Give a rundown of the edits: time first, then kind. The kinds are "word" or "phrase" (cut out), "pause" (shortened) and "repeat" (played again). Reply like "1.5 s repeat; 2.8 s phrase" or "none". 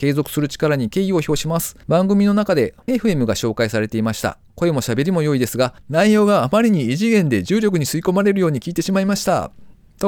1.8 s pause; 2.9 s phrase; 5.8 s pause